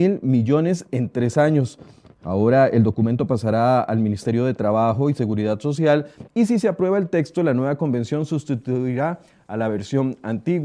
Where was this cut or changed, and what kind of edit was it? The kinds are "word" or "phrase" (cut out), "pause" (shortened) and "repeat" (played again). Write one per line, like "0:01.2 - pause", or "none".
none